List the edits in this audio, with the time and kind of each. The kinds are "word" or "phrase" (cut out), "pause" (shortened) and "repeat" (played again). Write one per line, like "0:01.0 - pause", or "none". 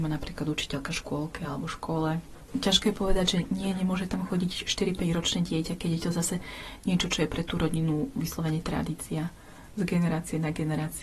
none